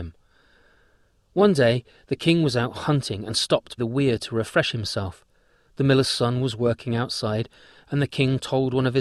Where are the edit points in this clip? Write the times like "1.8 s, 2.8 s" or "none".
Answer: 3.8 s